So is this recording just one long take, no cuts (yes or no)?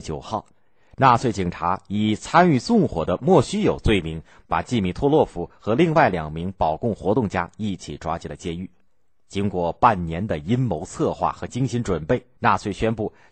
no